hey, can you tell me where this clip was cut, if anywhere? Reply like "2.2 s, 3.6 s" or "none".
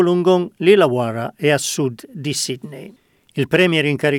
none